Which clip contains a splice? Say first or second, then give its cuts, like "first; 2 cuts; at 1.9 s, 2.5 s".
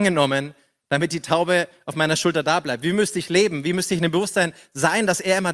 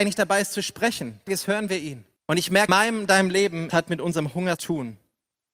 second; 5 cuts; at 1.3 s, 2.2 s, 2.7 s, 3.7 s, 4.6 s